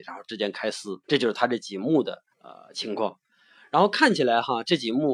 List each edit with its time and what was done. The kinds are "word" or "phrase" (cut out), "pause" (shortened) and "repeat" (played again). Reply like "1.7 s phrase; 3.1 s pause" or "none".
1.0 s pause; 2.3 s pause